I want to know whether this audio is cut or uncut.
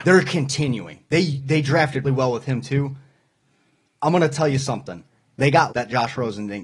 cut